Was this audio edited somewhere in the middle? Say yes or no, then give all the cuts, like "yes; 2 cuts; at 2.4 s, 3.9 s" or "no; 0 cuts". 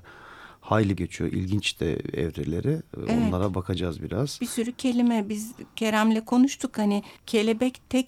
yes; 2 cuts; at 1.0 s, 7.2 s